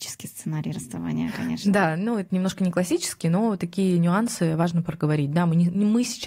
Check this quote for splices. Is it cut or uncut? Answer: uncut